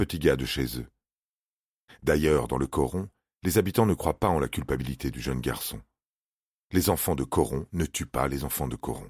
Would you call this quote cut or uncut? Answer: uncut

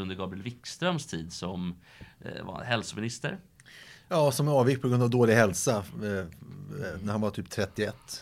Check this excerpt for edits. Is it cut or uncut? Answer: uncut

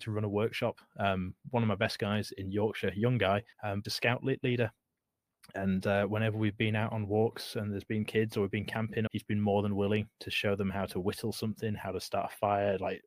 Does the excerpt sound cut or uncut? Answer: cut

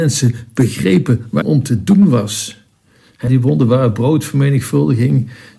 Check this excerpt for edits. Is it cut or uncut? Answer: cut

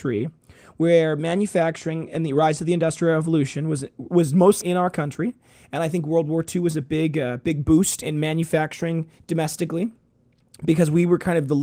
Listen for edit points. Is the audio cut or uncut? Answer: cut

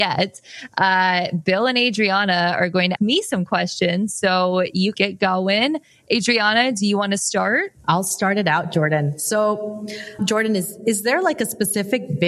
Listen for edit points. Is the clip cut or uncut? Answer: cut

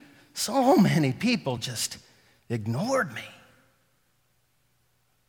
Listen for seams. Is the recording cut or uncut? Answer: uncut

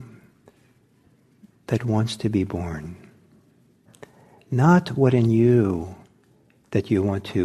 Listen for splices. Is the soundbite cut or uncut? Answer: uncut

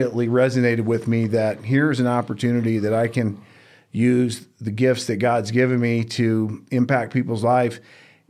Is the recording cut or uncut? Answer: uncut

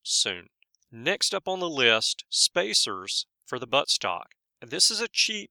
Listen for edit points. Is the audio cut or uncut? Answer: cut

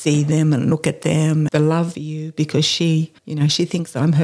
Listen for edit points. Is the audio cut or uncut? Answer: cut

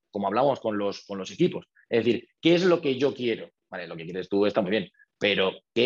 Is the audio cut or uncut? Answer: uncut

